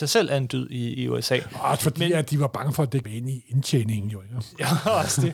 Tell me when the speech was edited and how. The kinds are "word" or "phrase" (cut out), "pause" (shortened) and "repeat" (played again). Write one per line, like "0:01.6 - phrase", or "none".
0:00.9 - word
0:03.0 - word